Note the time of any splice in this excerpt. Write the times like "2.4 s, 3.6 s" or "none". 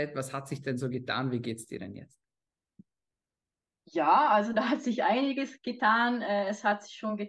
none